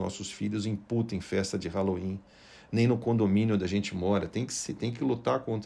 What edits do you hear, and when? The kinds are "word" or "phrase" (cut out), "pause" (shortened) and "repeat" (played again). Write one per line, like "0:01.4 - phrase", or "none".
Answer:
none

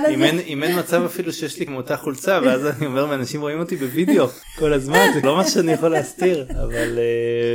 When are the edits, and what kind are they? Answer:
0:01.7 - phrase
0:05.2 - word

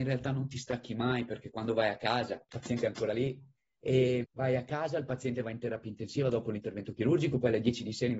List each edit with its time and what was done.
0:04.2 - word

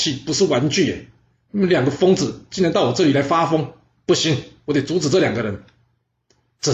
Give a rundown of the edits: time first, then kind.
none

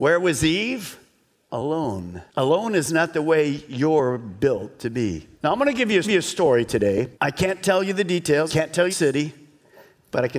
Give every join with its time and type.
0:02.3 - pause
0:05.4 - pause
0:06.0 - repeat
0:07.1 - pause
0:08.5 - word
0:08.9 - phrase

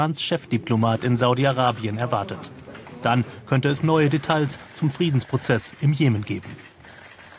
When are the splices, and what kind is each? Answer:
0:03.8 - word

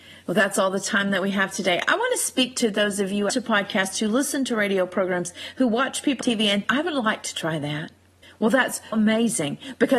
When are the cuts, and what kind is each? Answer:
0:03.3 - phrase
0:06.2 - word
0:06.6 - word
0:08.2 - pause
0:08.9 - word

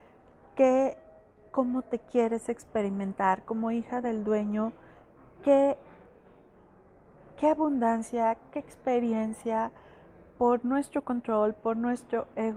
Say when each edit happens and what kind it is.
none

